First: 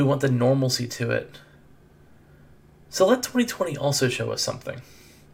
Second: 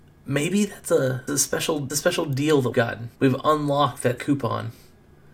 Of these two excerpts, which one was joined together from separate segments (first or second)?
second